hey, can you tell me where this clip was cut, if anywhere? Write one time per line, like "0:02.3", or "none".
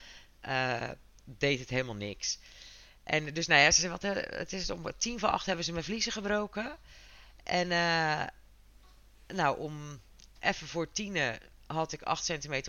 none